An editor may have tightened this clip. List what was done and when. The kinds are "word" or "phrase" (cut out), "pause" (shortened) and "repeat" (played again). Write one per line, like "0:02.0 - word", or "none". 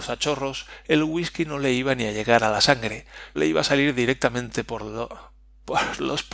0:03.4 - word